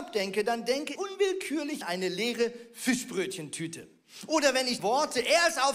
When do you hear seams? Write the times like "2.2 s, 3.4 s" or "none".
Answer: 1.0 s, 1.8 s, 4.8 s